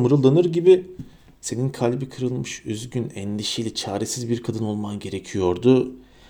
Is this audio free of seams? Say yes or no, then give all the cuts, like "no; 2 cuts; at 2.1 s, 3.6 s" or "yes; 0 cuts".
yes; 0 cuts